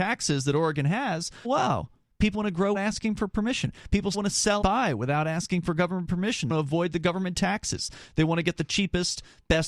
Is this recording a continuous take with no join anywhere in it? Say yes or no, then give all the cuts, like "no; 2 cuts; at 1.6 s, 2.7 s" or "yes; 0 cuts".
no; 6 cuts; at 1.4 s, 2.3 s, 2.7 s, 4.1 s, 4.6 s, 6.5 s